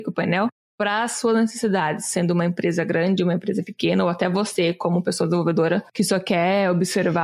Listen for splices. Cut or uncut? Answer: uncut